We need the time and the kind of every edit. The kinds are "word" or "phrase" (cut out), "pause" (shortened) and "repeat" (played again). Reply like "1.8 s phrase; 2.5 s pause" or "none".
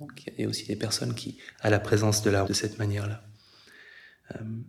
1.5 s word; 2.4 s word

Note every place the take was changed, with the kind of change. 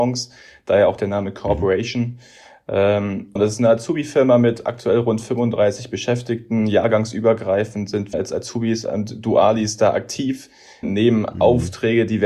3.4 s word; 8.1 s word; 10.8 s word

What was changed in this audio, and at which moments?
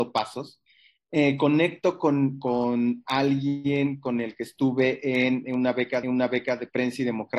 6.0 s repeat

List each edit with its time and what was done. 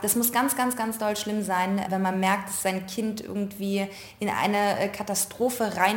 none

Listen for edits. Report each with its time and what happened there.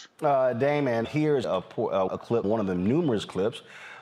1.0 s word; 1.4 s word; 2.1 s word; 2.4 s word

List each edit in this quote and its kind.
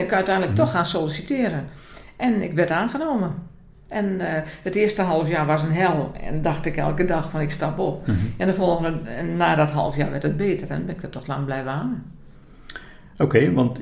none

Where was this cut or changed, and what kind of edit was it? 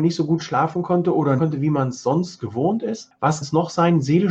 1.4 s phrase; 3.4 s word

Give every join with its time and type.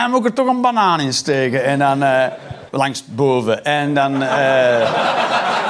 2.7 s pause

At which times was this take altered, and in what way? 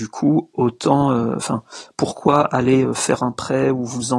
none

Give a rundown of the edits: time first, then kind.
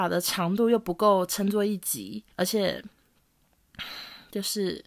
2.3 s pause

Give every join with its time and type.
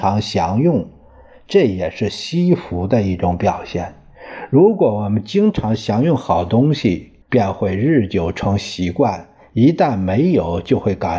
7.2 s pause

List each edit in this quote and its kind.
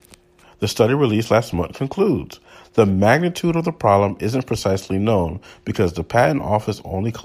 none

